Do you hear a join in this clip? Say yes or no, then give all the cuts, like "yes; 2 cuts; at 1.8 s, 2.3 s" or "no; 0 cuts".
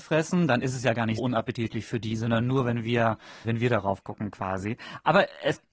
yes; 2 cuts; at 1.2 s, 3.4 s